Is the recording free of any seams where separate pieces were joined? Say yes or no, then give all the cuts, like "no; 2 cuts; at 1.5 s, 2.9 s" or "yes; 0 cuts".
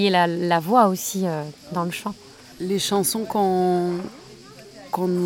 yes; 0 cuts